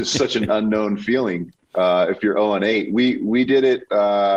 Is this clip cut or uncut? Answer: uncut